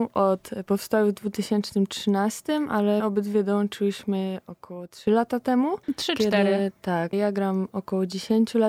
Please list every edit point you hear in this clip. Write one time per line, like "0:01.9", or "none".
0:03.0
0:05.8
0:07.1